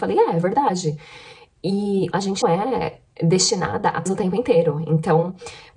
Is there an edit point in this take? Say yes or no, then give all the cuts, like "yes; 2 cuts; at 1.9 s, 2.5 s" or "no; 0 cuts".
yes; 3 cuts; at 2.1 s, 2.4 s, 4.1 s